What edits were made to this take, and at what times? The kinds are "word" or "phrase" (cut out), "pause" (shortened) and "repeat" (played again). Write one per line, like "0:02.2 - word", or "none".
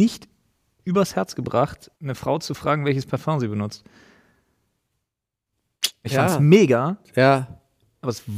0:02.0 - pause